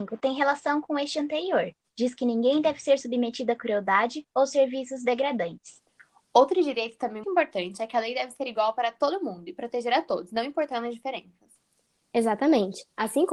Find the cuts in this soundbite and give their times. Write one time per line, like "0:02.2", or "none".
0:07.2